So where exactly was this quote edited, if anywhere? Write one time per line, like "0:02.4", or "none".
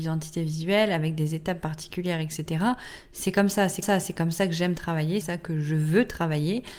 0:03.8
0:05.2